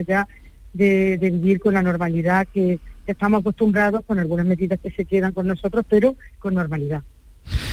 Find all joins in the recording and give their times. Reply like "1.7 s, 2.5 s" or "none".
6.3 s

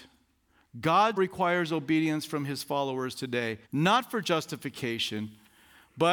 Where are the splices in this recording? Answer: 1.2 s, 3.6 s

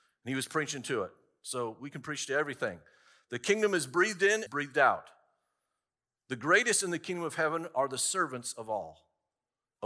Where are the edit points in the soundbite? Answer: 4.5 s

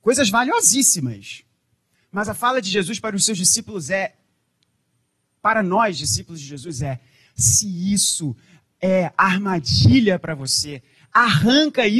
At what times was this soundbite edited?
none

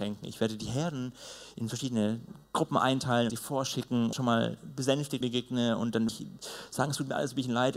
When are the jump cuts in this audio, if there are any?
3.3 s, 4.1 s, 5.2 s, 6.1 s

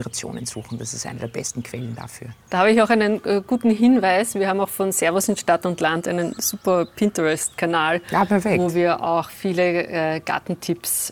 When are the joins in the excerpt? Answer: 2.4 s

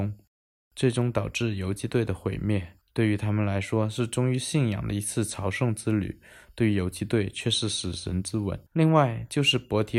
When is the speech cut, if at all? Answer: 2.8 s, 8.7 s

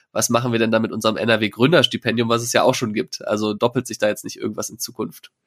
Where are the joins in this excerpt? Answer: none

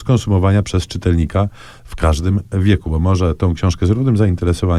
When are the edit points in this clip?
none

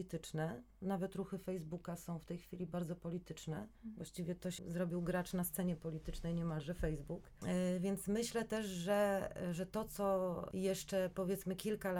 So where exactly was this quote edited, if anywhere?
3.7 s, 4.6 s

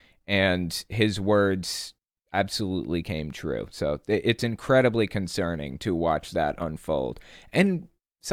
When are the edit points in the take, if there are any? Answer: none

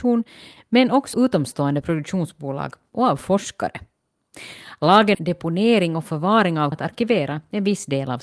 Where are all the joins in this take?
1.1 s, 5.1 s, 6.7 s

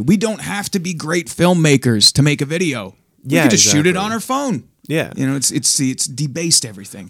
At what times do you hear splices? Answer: none

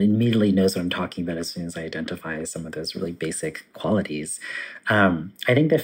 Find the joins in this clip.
none

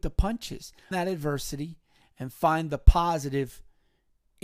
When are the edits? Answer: 0.9 s

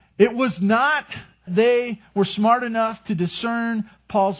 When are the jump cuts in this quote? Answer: 1.5 s

